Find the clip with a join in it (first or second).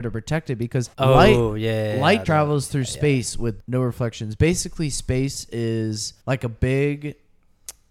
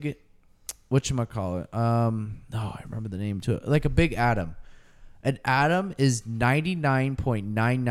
first